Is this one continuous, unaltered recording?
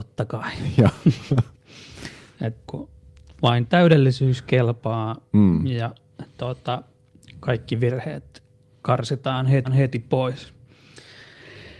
no; 3 cuts; at 1.5 s, 2.7 s, 9.6 s

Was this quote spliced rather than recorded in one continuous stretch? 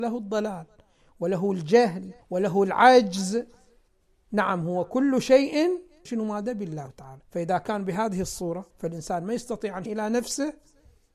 yes; 7 cuts; at 2.2 s, 3.9 s, 6.1 s, 6.9 s, 7.2 s, 8.7 s, 9.9 s

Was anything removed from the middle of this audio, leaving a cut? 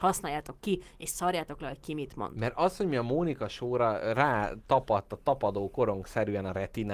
no; 0 cuts

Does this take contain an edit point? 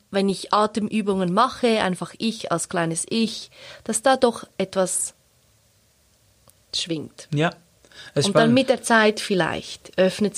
no; 0 cuts

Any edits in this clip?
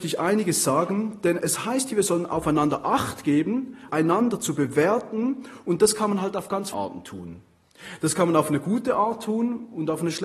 yes; 2 cuts; at 3.9 s, 6.7 s

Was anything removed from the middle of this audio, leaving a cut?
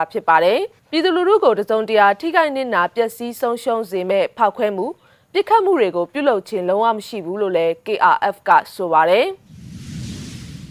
no; 0 cuts

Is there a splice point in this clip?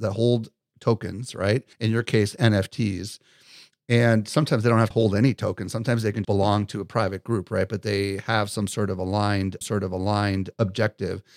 yes; 4 cuts; at 1.7 s, 4.9 s, 6.2 s, 9.6 s

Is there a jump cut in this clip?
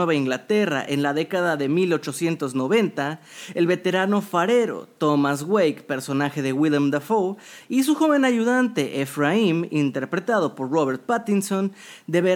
no; 0 cuts

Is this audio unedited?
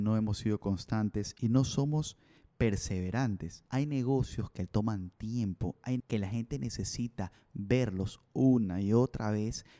no; 2 cuts; at 3.7 s, 6.0 s

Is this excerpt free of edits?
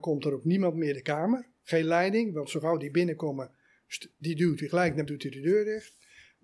no; 2 cuts; at 0.9 s, 5.1 s

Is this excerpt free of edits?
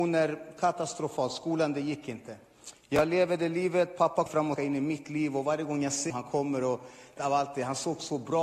no; 4 cuts; at 4.3 s, 4.6 s, 6.1 s, 7.2 s

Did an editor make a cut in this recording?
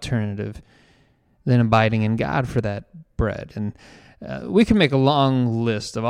no; 0 cuts

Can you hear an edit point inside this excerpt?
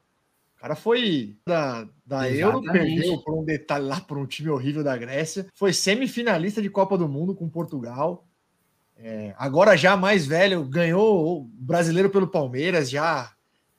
yes; 2 cuts; at 1.5 s, 5.5 s

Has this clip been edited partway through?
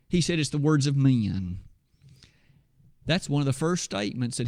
no; 0 cuts

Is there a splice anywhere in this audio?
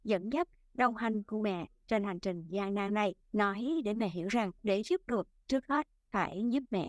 yes; 3 cuts; at 3.2 s, 4.6 s, 5.1 s

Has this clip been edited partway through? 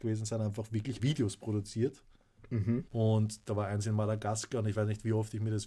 yes; 2 cuts; at 1.0 s, 2.9 s

